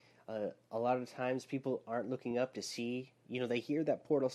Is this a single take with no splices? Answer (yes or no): yes